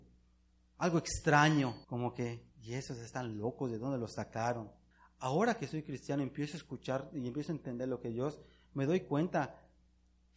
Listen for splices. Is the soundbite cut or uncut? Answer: cut